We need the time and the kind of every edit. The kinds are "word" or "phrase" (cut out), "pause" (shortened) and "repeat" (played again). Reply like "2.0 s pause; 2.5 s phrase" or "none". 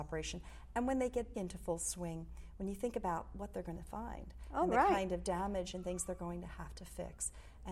1.3 s word